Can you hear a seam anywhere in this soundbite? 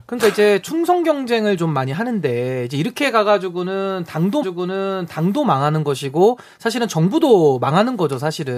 yes; 1 cut; at 4.4 s

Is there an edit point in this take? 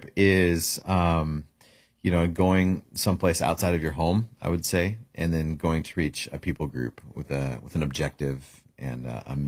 no; 0 cuts

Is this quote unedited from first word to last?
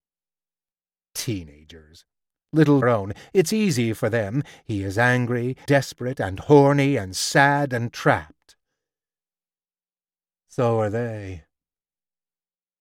no; 2 cuts; at 2.8 s, 5.6 s

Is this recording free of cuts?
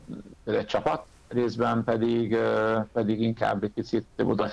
yes; 0 cuts

